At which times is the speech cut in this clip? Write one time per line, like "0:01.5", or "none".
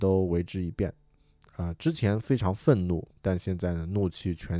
none